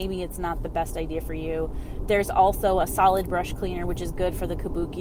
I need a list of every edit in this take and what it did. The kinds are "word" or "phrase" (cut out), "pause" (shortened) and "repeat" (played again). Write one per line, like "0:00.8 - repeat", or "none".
none